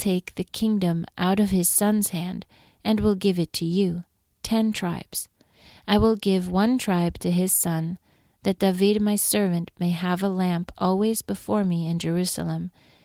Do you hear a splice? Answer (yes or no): no